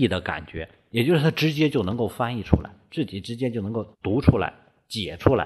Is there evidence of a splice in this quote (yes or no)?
yes